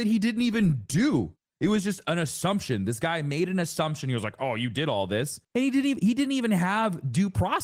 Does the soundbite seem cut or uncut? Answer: cut